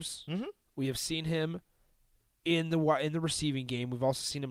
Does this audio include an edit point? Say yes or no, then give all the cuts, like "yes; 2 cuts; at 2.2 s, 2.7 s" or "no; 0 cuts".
no; 0 cuts